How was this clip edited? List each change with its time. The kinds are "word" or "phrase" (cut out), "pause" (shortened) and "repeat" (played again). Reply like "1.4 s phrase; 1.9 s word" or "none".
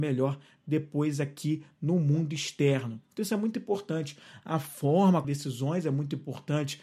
3.0 s pause; 5.2 s phrase